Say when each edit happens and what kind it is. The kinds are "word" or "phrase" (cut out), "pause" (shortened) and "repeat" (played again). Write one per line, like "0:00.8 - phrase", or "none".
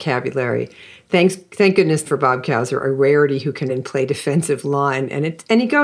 0:02.0 - word
0:03.7 - word